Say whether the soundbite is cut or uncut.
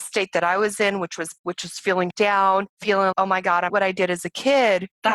cut